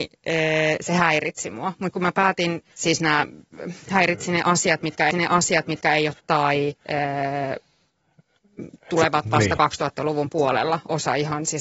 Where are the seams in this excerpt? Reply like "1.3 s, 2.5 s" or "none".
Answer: 1.9 s, 2.7 s, 5.1 s, 6.2 s, 6.8 s

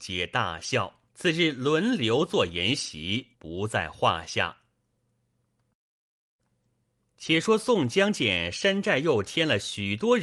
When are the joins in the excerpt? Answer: 1.1 s, 3.3 s

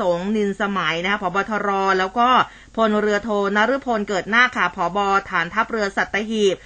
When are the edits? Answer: none

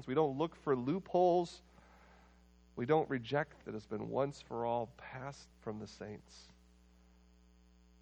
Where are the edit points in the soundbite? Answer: 3.6 s, 5.5 s

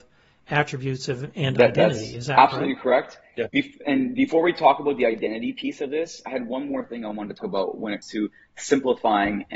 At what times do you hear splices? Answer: 7.4 s, 8.0 s

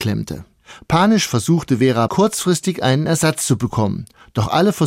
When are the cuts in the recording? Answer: 2.1 s

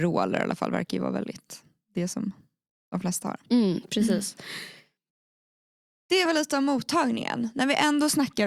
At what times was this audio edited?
none

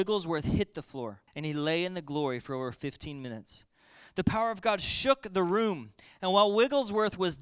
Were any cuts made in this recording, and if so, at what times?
1.3 s

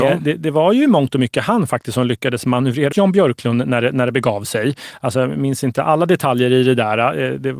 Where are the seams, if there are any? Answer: 2.9 s

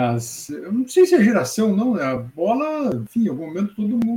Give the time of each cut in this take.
none

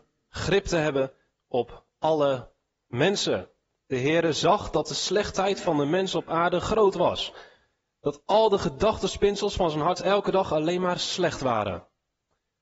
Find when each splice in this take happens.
none

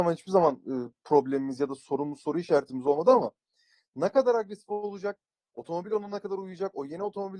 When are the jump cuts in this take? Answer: none

